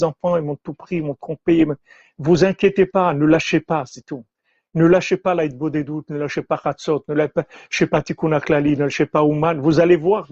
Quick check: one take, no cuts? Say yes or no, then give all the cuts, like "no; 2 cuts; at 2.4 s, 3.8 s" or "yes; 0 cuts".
yes; 0 cuts